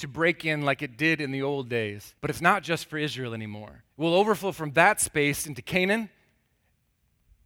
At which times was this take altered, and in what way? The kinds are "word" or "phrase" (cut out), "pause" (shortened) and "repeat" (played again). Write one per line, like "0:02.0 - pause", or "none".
0:02.2 - pause
0:03.9 - pause